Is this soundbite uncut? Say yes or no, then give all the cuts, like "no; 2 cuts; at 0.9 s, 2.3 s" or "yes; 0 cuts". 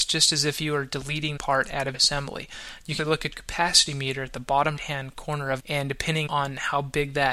no; 7 cuts; at 1.4 s, 1.9 s, 3.0 s, 3.3 s, 4.8 s, 5.6 s, 6.3 s